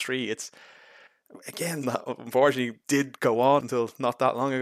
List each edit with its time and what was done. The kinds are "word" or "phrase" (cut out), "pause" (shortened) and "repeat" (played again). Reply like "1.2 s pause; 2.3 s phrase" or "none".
1.8 s word; 3.6 s word